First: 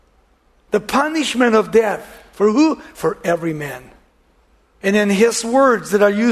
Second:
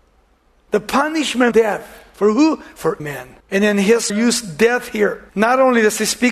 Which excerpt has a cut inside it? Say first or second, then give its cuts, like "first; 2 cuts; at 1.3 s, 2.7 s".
second; 5 cuts; at 1.5 s, 3.0 s, 3.4 s, 4.1 s, 5.3 s